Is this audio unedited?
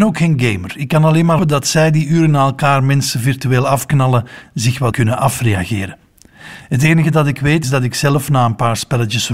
no; 3 cuts; at 1.4 s, 4.9 s, 7.6 s

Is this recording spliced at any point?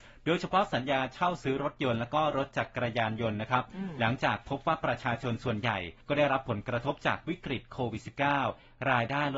yes; 1 cut; at 6.0 s

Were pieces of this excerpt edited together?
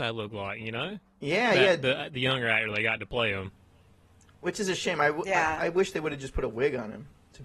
no; 0 cuts

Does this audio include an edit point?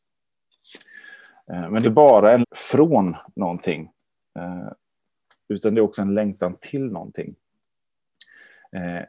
yes; 2 cuts; at 1.8 s, 2.4 s

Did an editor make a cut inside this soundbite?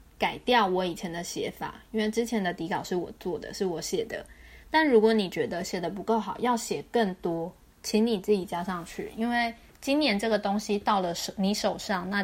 no; 0 cuts

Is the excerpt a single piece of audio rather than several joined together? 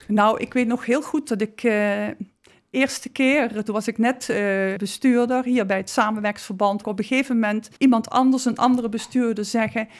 no; 3 cuts; at 4.8 s, 6.8 s, 7.8 s

